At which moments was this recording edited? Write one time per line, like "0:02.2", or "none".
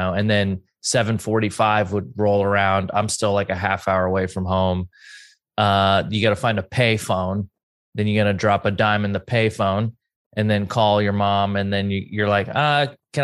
none